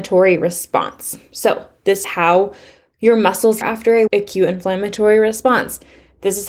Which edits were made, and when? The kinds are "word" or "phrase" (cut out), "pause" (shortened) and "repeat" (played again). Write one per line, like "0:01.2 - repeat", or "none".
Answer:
0:02.0 - word
0:03.6 - phrase
0:04.1 - word